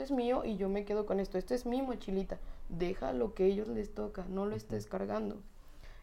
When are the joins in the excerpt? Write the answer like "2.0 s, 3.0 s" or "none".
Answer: none